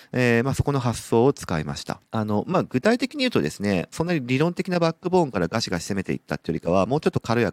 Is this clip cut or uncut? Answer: cut